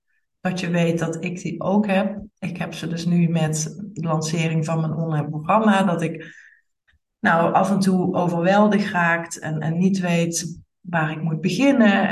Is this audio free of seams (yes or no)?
no